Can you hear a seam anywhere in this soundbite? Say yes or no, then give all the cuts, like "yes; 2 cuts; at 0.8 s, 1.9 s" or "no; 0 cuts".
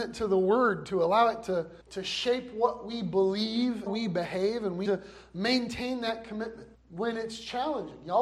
yes; 4 cuts; at 1.8 s, 3.9 s, 4.8 s, 6.7 s